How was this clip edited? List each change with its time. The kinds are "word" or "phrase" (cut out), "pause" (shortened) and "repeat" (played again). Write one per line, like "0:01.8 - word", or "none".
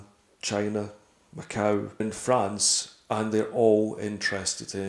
0:02.0 - word